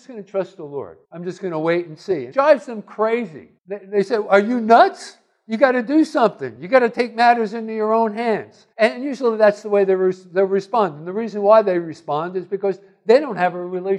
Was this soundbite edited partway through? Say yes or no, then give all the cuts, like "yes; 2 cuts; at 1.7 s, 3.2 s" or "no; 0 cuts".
yes; 4 cuts; at 1.0 s, 2.3 s, 3.6 s, 8.7 s